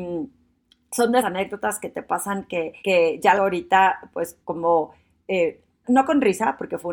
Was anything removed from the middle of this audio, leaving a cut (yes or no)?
yes